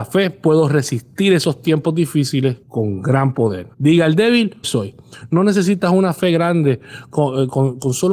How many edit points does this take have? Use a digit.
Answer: 3